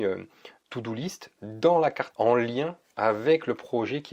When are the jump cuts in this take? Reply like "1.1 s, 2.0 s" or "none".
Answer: 2.1 s

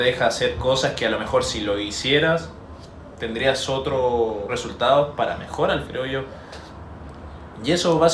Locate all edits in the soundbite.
4.5 s, 5.8 s

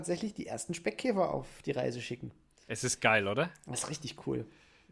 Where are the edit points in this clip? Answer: none

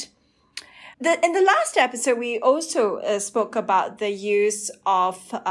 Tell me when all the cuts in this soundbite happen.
0.9 s

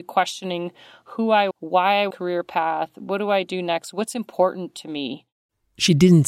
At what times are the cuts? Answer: 1.5 s, 2.1 s

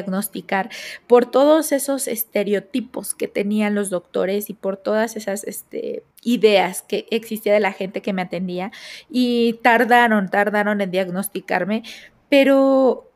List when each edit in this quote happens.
6.1 s

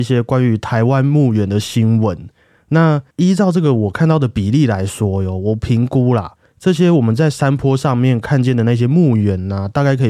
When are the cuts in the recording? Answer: 3.1 s

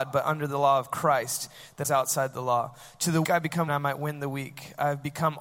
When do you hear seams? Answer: 1.8 s, 3.2 s, 3.7 s

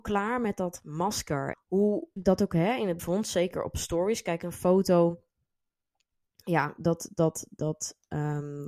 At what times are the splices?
1.5 s, 2.2 s, 3.0 s

